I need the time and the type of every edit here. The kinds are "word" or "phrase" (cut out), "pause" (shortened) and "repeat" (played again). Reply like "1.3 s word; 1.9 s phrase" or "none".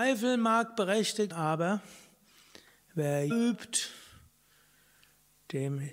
1.3 s word; 3.3 s word